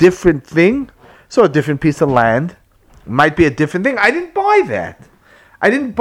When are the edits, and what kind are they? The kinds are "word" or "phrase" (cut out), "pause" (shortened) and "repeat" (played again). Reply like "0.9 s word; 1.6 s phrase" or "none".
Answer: none